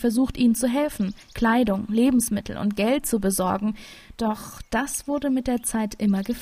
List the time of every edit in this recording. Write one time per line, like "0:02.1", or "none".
0:01.2